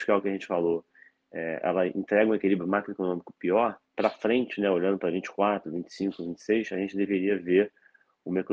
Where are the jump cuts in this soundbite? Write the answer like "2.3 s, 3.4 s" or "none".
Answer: 3.9 s